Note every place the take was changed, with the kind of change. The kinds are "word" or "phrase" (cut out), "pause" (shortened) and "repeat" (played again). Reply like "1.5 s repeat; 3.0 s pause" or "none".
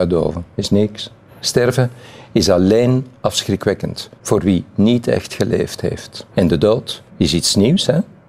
1.3 s pause; 4.2 s pause; 6.3 s pause; 7.1 s pause

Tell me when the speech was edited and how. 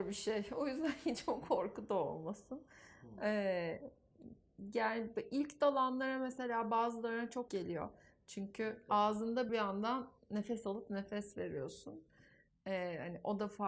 7.5 s word; 9.5 s phrase

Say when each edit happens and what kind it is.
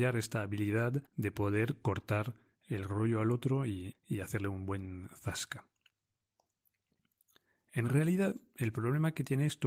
1.1 s pause; 3.9 s word

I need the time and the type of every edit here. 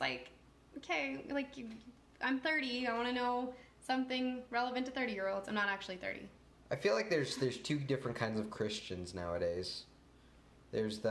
none

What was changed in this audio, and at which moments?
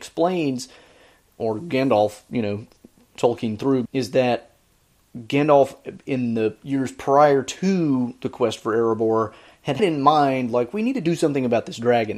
3.9 s word; 9.8 s word

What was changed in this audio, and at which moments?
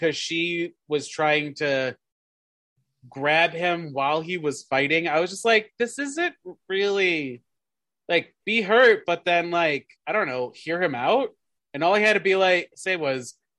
9.9 s pause

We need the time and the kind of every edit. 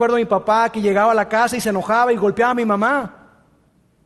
none

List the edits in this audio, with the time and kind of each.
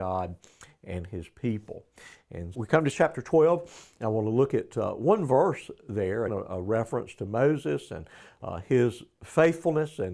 2.5 s word; 6.3 s word

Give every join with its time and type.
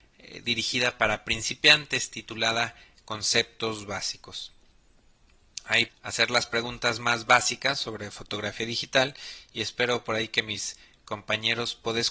5.9 s word

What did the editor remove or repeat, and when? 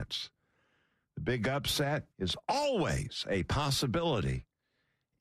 2.1 s pause

